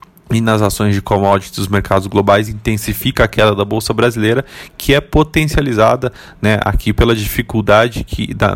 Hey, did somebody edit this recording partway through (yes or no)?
no